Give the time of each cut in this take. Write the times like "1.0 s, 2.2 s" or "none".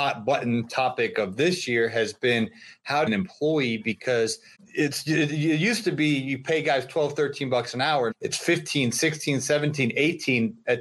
3.1 s, 4.5 s, 8.1 s